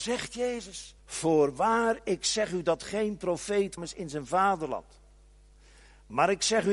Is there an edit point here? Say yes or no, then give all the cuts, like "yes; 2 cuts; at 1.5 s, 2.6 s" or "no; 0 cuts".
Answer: yes; 2 cuts; at 1.0 s, 3.8 s